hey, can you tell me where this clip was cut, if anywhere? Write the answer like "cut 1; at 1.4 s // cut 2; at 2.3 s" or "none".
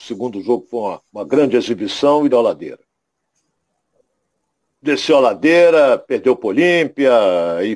cut 1; at 1.1 s // cut 2; at 2.3 s